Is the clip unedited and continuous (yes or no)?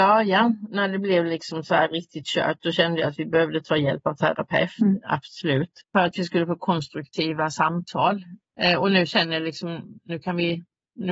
no